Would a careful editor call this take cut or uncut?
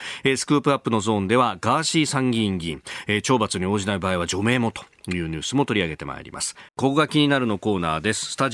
cut